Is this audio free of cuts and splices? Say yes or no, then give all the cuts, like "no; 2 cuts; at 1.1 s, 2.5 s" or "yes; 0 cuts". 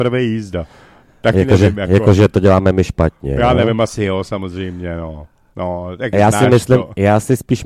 yes; 0 cuts